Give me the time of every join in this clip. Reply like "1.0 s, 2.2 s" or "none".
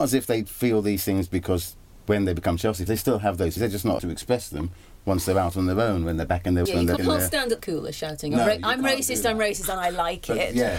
1.3 s, 2.9 s, 3.6 s, 4.0 s, 6.7 s, 7.0 s, 7.6 s